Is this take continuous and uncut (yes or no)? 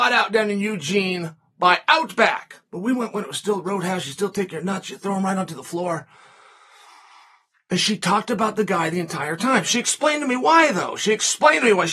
yes